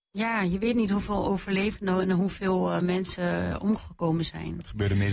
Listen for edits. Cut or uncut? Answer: uncut